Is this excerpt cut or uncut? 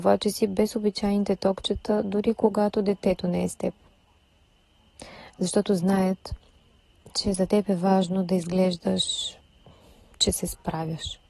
uncut